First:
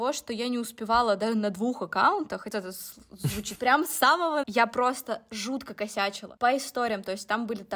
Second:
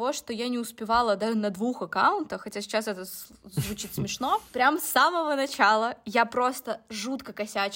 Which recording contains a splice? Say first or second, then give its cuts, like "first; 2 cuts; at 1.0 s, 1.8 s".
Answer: first; 3 cuts; at 2.5 s, 3.6 s, 4.4 s